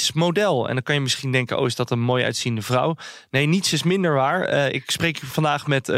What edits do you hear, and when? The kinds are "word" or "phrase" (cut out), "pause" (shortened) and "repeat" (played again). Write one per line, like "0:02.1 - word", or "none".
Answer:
none